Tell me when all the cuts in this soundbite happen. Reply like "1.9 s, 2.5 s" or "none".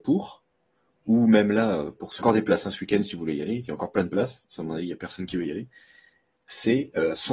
2.2 s